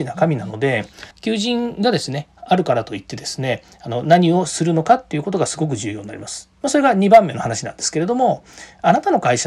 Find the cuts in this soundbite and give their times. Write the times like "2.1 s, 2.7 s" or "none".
1.1 s